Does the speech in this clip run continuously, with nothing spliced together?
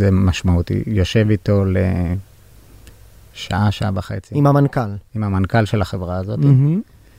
yes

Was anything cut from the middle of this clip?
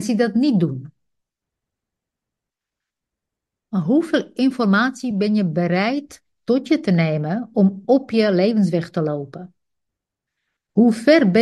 no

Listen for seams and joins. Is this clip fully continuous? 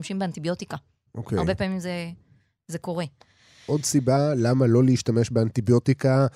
yes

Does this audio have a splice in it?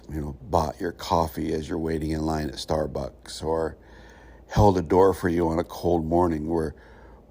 no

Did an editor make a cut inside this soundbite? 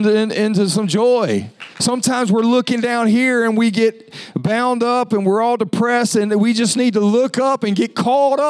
yes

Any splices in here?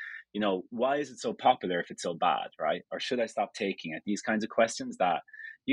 no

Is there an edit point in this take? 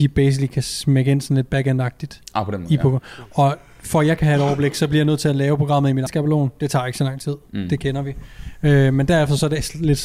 yes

